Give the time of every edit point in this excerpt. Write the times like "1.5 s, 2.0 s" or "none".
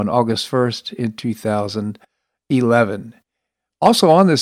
none